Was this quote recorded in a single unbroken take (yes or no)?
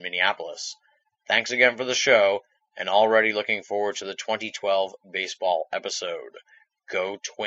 yes